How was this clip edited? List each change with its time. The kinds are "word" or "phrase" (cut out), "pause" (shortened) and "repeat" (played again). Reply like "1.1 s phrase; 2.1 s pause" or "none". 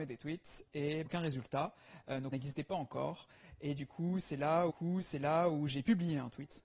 1.1 s word; 2.3 s word; 4.7 s repeat